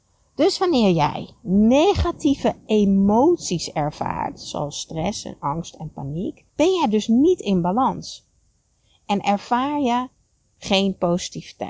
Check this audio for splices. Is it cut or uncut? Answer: cut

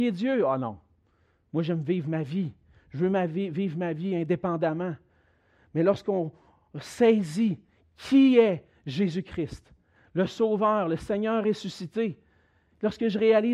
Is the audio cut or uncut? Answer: uncut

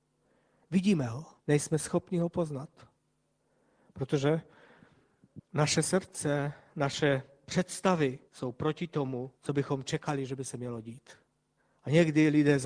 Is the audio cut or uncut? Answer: cut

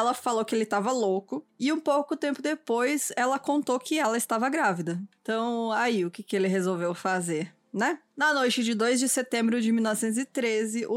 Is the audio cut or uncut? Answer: uncut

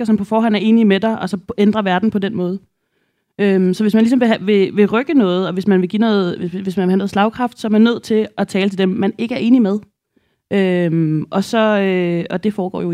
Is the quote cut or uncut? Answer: uncut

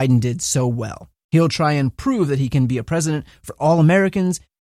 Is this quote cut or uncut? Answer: uncut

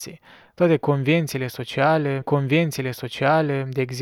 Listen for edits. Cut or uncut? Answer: cut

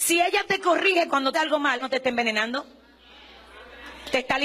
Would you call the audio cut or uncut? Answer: cut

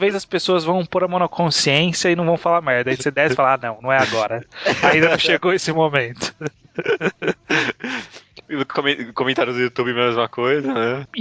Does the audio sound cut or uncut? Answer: uncut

